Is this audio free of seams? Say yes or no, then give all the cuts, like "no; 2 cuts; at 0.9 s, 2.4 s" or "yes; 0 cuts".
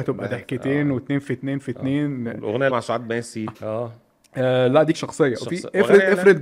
no; 3 cuts; at 2.7 s, 3.5 s, 4.9 s